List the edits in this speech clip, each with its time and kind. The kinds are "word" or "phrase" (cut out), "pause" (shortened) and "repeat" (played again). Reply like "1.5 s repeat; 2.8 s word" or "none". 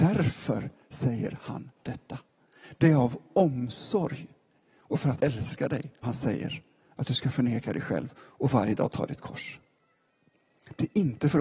5.2 s word; 6.0 s word